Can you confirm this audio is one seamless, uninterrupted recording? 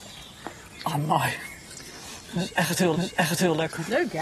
no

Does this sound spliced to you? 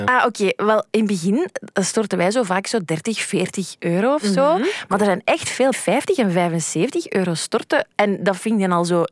yes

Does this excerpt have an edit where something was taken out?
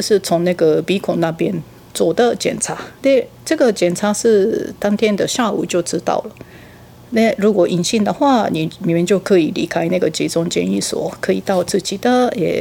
yes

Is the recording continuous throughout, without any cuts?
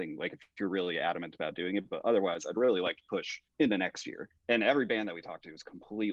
no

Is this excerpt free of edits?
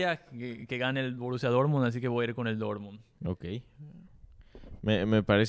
yes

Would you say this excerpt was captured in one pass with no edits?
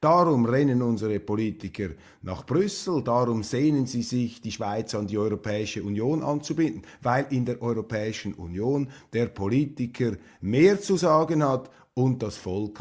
yes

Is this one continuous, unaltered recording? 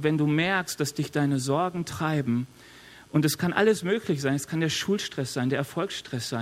yes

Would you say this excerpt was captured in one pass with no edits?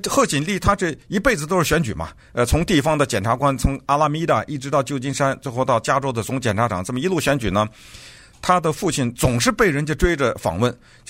yes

